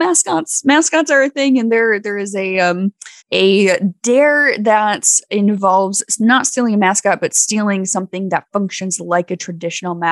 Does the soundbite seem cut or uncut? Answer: cut